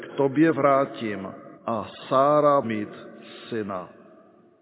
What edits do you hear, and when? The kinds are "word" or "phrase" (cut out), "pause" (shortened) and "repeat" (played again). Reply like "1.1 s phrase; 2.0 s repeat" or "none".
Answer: 1.6 s pause; 2.6 s word